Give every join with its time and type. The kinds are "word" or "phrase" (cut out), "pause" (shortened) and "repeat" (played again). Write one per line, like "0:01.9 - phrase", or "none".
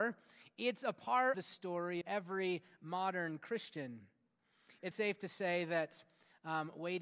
0:01.3 - word
0:02.0 - word
0:04.9 - word